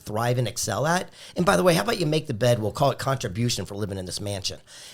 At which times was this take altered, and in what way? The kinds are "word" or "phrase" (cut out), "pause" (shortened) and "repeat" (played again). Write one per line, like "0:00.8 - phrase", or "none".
none